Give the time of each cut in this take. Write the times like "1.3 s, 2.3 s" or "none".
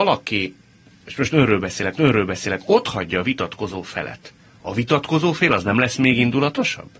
2.0 s